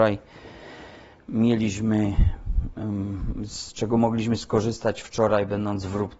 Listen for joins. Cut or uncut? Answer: uncut